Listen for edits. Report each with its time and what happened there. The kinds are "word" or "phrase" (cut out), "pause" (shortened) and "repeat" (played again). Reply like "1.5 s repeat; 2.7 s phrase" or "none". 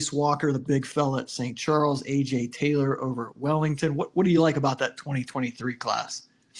none